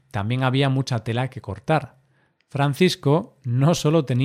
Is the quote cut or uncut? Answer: uncut